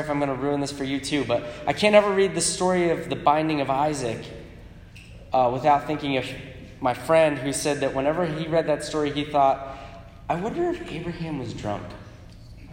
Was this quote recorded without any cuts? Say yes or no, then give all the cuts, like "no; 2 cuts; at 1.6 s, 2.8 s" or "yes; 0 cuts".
yes; 0 cuts